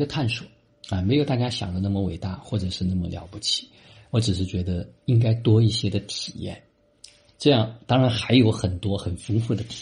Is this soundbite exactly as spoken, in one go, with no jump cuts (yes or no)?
yes